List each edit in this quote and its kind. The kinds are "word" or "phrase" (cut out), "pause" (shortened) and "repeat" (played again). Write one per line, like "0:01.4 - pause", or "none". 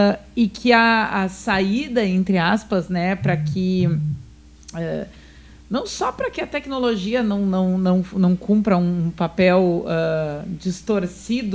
none